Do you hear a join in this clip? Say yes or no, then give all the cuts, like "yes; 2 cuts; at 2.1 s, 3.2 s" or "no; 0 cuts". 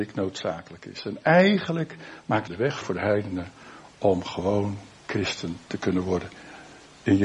yes; 2 cuts; at 2.5 s, 2.8 s